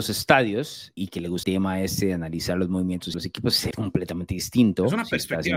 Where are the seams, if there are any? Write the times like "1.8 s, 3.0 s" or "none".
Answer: 1.0 s, 1.4 s, 3.1 s, 3.7 s